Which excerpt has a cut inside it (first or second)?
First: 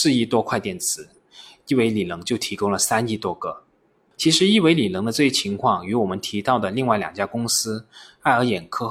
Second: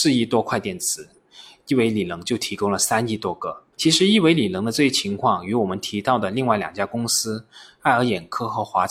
second